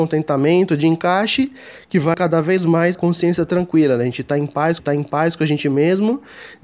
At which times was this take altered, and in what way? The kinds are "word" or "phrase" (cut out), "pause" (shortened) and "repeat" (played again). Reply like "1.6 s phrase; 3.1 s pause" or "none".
2.1 s phrase; 2.9 s word; 4.8 s repeat